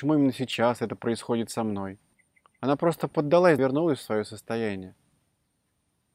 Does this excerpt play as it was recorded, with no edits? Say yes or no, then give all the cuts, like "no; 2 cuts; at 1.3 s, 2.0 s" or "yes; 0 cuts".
no; 2 cuts; at 2.1 s, 3.6 s